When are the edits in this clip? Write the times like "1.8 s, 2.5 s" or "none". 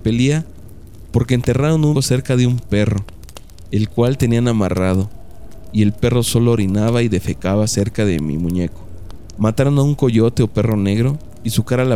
1.9 s